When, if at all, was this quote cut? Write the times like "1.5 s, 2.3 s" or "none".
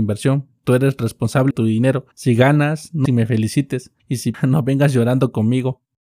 1.5 s, 2.1 s, 3.0 s, 4.0 s, 4.3 s